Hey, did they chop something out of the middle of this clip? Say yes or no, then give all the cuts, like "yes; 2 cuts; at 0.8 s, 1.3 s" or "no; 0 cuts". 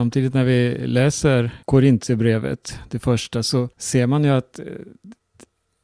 yes; 2 cuts; at 1.6 s, 3.7 s